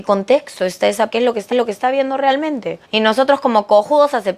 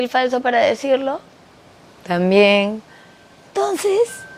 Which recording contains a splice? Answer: first; 3 cuts; at 1.1 s, 1.5 s, 2.8 s

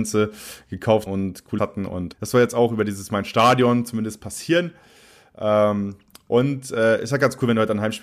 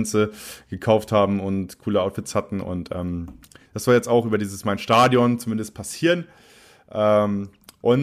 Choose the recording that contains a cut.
first; 3 cuts; at 1.1 s, 1.6 s, 2.1 s

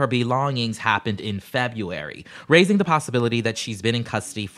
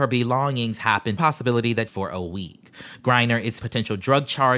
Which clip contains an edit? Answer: second; 3 cuts; at 1.2 s, 1.9 s, 3.6 s

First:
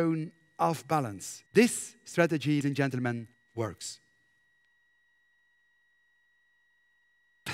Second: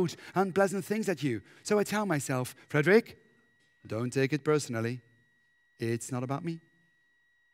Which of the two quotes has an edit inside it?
first; 3 cuts; at 1.5 s, 2.6 s, 3.3 s

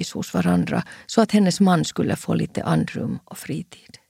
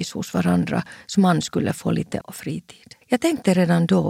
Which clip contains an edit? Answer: second; 3 cuts; at 1.1 s, 2.2 s, 3.0 s

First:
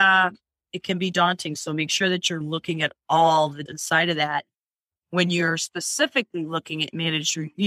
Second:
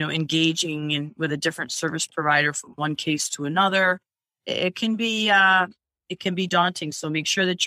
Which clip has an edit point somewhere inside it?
first; 2 cuts; at 2.4 s, 3.7 s

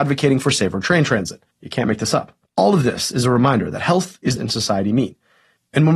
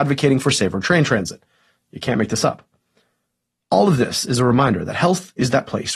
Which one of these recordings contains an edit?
first; 3 cuts; at 1.5 s, 2.5 s, 4.4 s

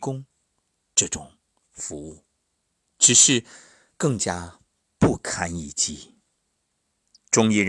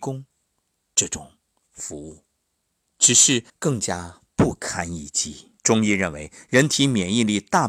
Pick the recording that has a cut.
second; 3 cuts; at 3.5 s, 4.3 s, 5.6 s

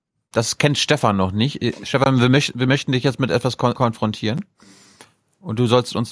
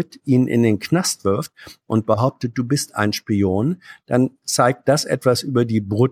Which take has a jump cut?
first; 1 cut; at 3.7 s

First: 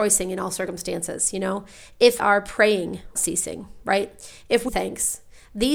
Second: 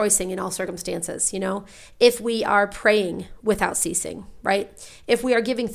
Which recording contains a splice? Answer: first; 3 cuts; at 2.2 s, 3.2 s, 4.7 s

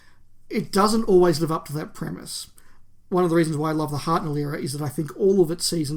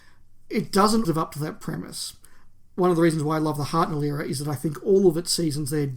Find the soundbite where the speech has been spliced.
second; 1 cut; at 1.0 s

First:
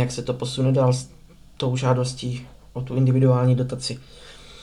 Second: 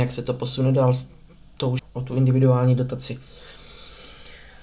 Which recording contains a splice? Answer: second; 1 cut; at 1.8 s

